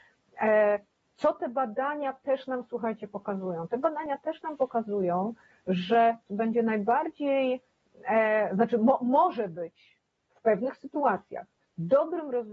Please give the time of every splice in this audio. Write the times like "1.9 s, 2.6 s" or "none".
6.3 s